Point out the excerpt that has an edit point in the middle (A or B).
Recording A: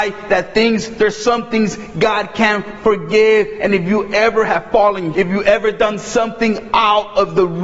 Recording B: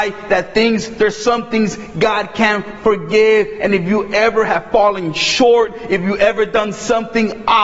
A